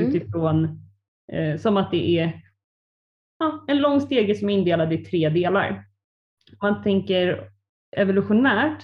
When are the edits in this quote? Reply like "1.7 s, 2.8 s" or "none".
none